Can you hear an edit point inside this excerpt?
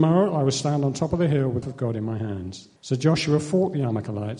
yes; 2 cuts; at 1.6 s, 2.8 s

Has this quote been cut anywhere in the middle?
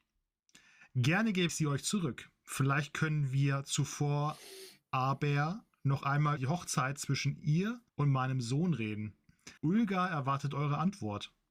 yes; 4 cuts; at 1.5 s, 6.4 s, 7.9 s, 9.6 s

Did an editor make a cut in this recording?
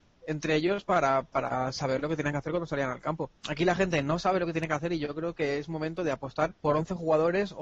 yes; 2 cuts; at 3.4 s, 6.6 s

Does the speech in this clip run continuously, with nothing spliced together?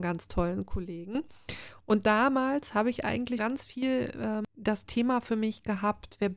no; 1 cut; at 3.4 s

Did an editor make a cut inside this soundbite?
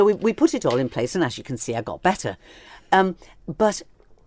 no; 0 cuts

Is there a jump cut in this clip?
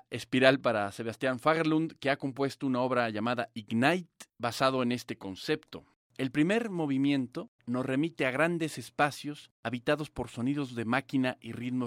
yes; 4 cuts; at 4.3 s, 6.0 s, 7.6 s, 9.5 s

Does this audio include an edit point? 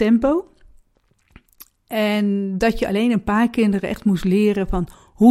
no; 0 cuts

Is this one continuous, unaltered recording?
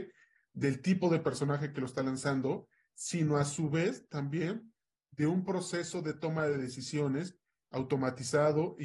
yes; 0 cuts

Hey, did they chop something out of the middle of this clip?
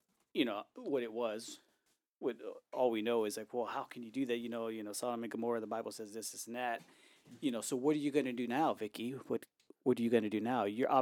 no; 0 cuts

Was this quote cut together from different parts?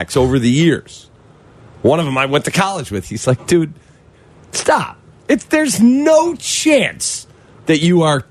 no; 0 cuts

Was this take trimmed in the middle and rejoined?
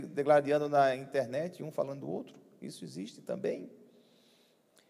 no; 0 cuts

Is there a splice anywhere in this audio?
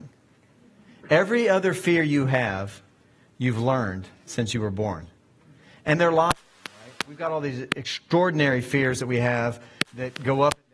yes; 1 cut; at 7.1 s

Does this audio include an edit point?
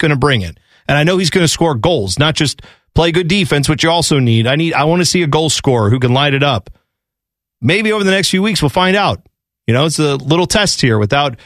no; 0 cuts

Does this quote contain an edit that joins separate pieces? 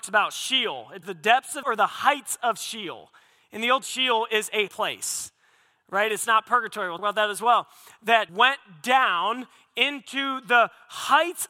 yes; 6 cuts; at 1.0 s, 1.6 s, 3.8 s, 4.7 s, 7.0 s, 8.3 s

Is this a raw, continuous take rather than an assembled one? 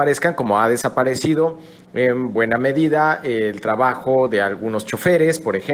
yes; 0 cuts

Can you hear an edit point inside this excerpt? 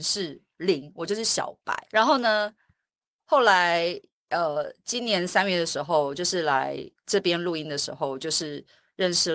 yes; 1 cut; at 1.9 s

